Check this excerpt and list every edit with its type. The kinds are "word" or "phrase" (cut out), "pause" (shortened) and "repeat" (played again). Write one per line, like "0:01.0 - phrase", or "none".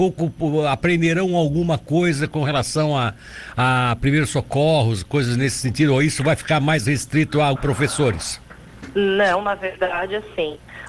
0:07.6 - phrase